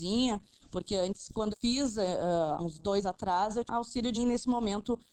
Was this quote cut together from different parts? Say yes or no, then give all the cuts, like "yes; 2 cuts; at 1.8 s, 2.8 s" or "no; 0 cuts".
yes; 5 cuts; at 1.5 s, 2.6 s, 3.0 s, 3.7 s, 4.2 s